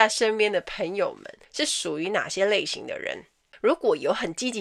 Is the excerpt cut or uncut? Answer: uncut